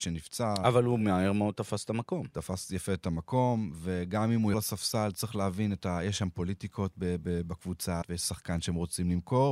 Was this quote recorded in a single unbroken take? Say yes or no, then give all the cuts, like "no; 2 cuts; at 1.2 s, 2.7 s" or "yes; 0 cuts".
no; 3 cuts; at 4.5 s, 7.2 s, 8.0 s